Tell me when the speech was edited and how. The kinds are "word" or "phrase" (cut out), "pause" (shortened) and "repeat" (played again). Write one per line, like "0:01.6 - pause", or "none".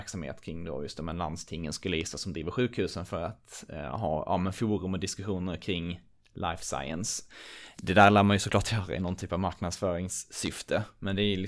none